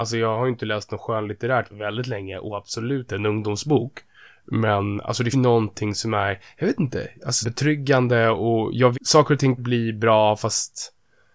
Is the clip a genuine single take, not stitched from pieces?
no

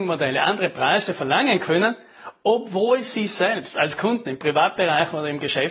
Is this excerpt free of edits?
yes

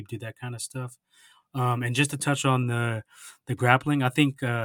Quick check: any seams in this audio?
no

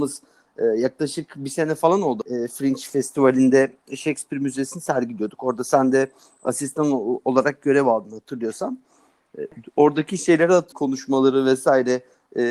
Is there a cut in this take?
no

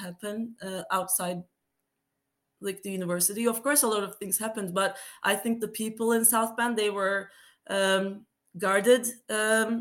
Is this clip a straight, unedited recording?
yes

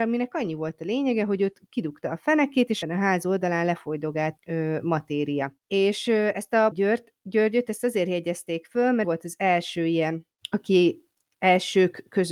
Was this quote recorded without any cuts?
no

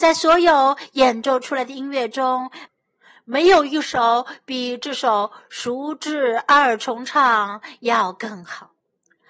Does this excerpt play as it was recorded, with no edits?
yes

